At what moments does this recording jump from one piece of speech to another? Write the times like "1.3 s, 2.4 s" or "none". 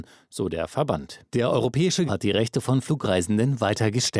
1.3 s, 2.1 s